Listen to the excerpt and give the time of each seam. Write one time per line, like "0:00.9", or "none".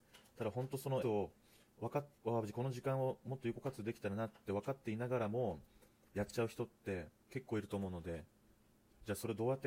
0:01.0
0:02.2
0:07.2